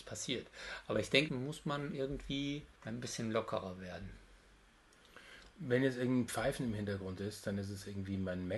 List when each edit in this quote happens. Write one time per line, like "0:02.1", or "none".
0:01.3